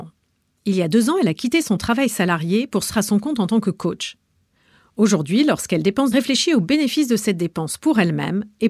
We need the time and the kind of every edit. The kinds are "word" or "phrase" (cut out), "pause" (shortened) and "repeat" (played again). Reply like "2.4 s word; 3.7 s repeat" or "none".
2.9 s word; 6.1 s phrase

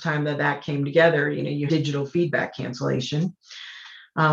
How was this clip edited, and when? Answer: 1.7 s word

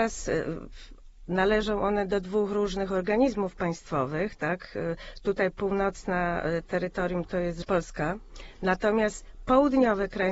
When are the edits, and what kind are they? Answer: none

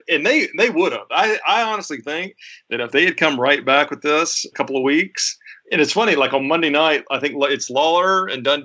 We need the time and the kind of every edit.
4.5 s phrase

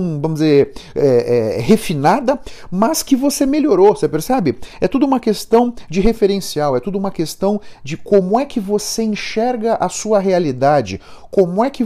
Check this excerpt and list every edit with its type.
none

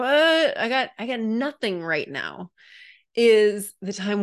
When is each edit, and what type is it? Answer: none

